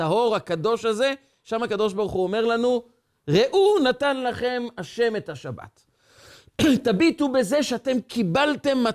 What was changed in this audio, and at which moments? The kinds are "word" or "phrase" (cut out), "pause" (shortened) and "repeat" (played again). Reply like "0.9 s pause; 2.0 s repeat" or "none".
none